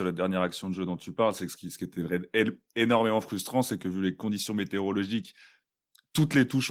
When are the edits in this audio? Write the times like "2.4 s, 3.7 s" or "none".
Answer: none